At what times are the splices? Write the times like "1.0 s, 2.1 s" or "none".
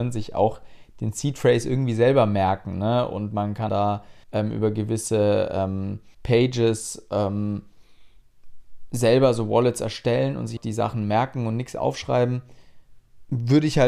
3.7 s, 4.2 s, 6.1 s, 10.6 s